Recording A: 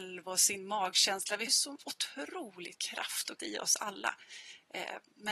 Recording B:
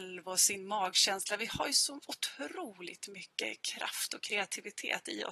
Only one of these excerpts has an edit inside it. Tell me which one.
A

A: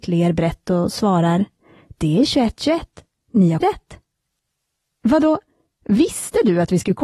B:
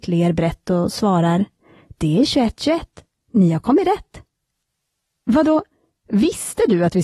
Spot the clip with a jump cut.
A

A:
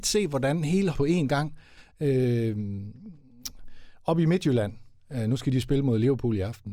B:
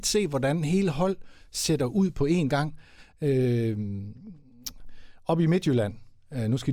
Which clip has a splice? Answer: A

